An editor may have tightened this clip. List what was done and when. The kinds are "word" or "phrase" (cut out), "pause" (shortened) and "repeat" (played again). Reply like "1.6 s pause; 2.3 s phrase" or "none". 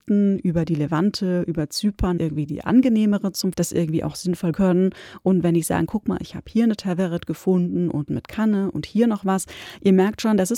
2.2 s phrase; 3.5 s word; 4.5 s word; 5.9 s word; 8.1 s phrase